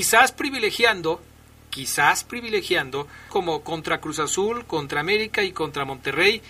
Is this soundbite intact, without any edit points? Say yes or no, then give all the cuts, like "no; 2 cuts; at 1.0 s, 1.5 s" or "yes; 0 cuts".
no; 1 cut; at 3.3 s